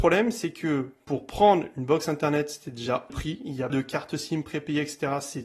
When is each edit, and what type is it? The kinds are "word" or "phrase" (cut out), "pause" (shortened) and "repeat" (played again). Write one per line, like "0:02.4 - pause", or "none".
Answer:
0:03.1 - phrase
0:03.7 - word